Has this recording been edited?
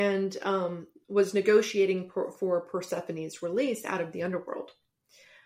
no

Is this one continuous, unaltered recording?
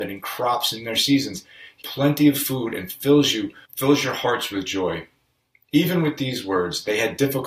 no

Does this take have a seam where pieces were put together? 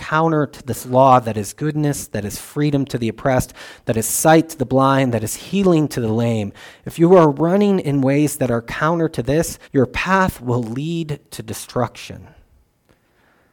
yes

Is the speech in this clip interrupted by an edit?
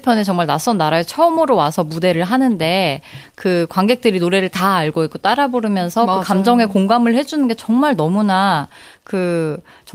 no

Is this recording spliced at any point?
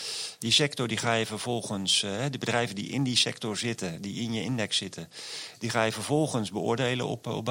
no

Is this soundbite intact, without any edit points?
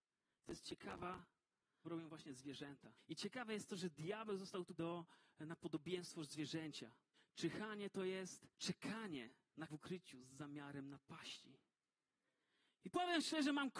no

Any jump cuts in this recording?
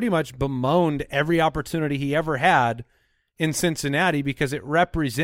no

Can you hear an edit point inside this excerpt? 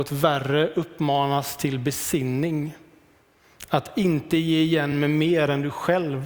no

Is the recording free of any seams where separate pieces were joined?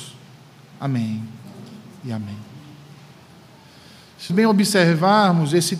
no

